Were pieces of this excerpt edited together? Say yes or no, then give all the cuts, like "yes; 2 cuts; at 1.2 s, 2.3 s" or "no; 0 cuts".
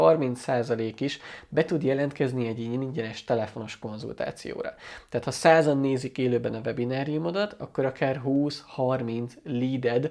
no; 0 cuts